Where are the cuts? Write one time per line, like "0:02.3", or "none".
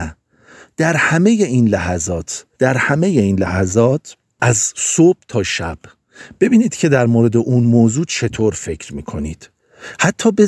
0:02.5